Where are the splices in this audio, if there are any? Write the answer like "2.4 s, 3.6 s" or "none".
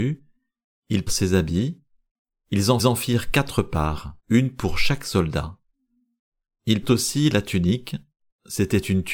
1.1 s, 2.8 s, 4.2 s, 6.8 s

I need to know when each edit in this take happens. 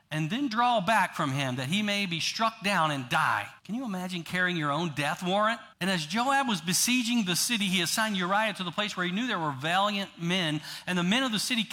3.6 s, 5.7 s

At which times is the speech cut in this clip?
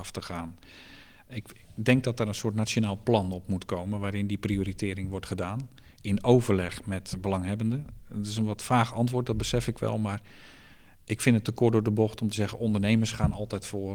7.1 s

